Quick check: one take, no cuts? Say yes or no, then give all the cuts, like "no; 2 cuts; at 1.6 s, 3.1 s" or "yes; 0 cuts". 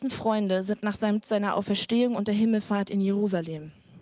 no; 1 cut; at 1.2 s